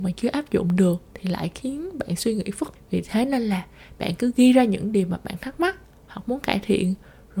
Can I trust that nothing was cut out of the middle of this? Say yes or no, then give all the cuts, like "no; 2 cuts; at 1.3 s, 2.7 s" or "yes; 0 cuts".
no; 1 cut; at 2.8 s